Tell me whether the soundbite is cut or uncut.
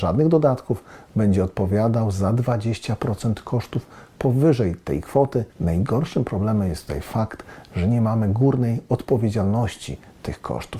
cut